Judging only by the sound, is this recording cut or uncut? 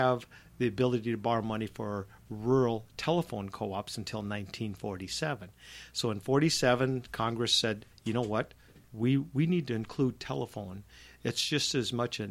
uncut